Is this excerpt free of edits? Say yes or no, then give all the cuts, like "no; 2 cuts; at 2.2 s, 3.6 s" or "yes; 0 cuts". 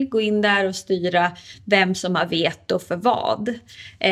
yes; 0 cuts